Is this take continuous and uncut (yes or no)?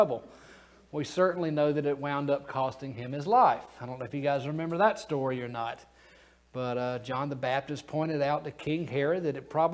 yes